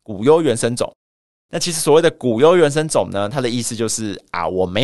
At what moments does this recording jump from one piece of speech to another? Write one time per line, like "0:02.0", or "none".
none